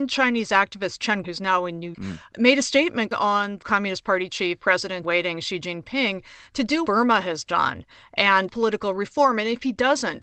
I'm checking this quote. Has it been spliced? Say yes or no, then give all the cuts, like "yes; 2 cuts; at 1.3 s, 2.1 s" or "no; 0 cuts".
yes; 8 cuts; at 1.2 s, 1.9 s, 3.1 s, 3.6 s, 4.6 s, 5.0 s, 6.8 s, 8.5 s